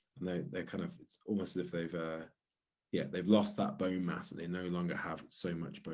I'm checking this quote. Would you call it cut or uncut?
uncut